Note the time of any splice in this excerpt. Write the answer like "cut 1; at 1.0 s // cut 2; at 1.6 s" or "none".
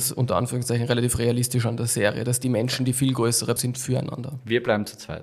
cut 1; at 3.6 s